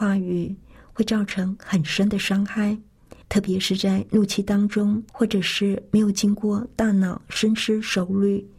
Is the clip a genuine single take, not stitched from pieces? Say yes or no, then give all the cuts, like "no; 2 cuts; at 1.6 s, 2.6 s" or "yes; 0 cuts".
no; 2 cuts; at 3.2 s, 5.1 s